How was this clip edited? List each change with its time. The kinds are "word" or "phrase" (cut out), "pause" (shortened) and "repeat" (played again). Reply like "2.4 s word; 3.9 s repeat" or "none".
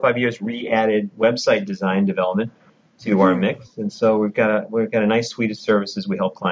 none